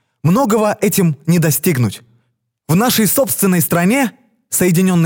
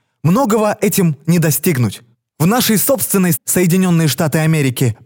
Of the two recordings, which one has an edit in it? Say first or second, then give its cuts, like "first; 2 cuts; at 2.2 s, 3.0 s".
second; 2 cuts; at 2.1 s, 3.3 s